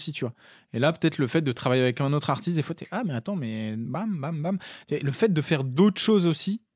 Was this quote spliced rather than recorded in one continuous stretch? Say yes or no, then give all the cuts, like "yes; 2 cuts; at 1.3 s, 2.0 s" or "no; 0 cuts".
no; 0 cuts